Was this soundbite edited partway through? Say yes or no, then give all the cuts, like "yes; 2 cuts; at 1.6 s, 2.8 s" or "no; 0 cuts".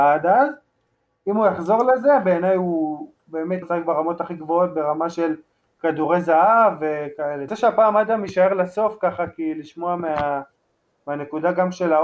yes; 2 cuts; at 3.6 s, 7.5 s